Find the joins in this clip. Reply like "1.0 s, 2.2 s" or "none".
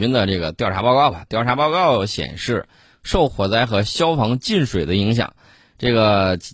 none